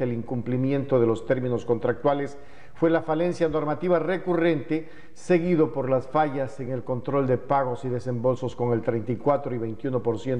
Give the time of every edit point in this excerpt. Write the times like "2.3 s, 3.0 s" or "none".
none